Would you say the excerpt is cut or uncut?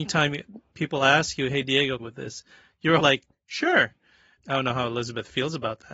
cut